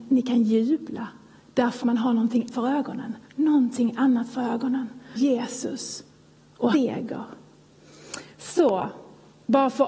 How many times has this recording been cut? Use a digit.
5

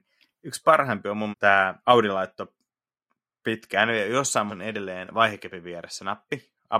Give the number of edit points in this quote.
3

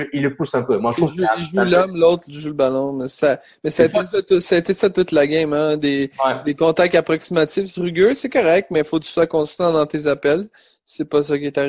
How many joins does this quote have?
0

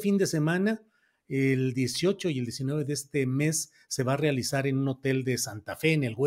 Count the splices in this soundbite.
0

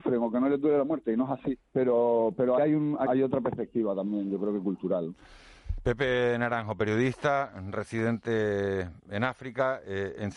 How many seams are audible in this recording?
3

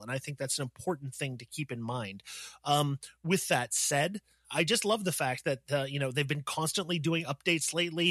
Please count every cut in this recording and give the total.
1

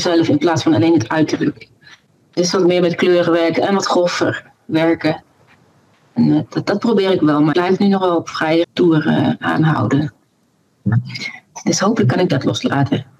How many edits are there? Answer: 2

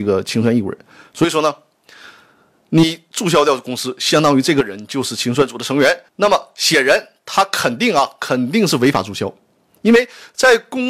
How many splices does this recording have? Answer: 1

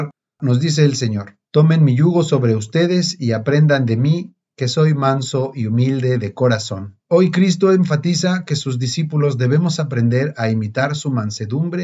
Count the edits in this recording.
2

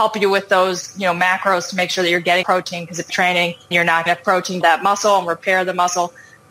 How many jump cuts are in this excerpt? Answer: 5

